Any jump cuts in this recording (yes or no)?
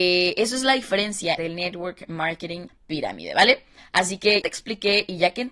yes